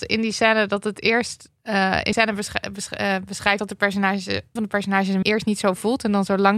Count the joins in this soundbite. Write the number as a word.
five